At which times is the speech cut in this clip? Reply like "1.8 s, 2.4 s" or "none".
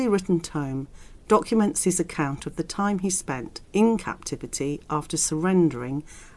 3.6 s